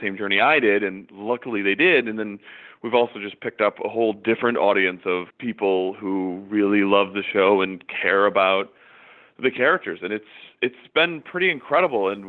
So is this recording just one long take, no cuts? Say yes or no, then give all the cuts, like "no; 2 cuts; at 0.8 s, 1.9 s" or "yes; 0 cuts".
no; 1 cut; at 5.3 s